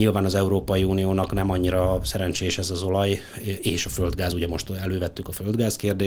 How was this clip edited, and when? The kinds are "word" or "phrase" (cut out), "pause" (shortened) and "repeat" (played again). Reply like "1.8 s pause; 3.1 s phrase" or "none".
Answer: none